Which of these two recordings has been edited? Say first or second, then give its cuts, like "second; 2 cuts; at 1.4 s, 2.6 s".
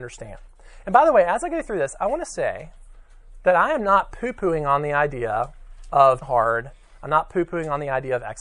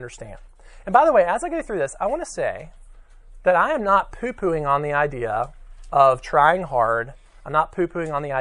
first; 1 cut; at 6.2 s